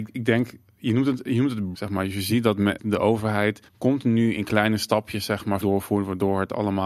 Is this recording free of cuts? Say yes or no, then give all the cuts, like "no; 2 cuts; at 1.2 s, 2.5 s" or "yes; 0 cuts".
no; 4 cuts; at 1.7 s, 2.8 s, 3.7 s, 5.6 s